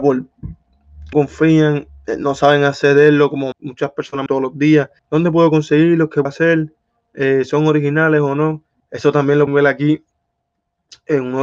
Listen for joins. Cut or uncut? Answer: cut